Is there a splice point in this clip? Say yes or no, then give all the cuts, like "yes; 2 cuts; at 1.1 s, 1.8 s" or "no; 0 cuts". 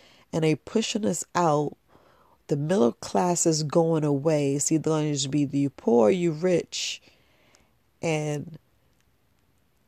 no; 0 cuts